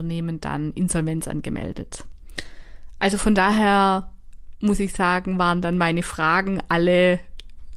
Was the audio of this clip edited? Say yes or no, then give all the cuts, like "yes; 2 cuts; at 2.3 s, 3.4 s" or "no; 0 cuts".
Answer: no; 0 cuts